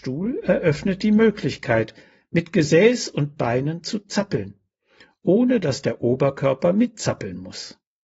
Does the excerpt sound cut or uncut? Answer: uncut